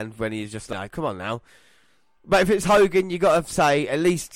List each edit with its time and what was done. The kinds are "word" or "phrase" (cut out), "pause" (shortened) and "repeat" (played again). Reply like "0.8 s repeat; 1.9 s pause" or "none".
none